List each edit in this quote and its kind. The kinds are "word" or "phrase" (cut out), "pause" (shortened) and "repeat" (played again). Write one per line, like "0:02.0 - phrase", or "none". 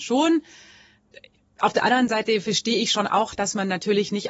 none